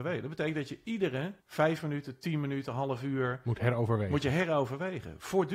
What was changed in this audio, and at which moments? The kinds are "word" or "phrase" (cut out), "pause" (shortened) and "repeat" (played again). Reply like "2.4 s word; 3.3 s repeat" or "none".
1.4 s pause